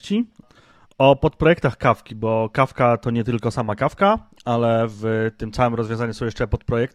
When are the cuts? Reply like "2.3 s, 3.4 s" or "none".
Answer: none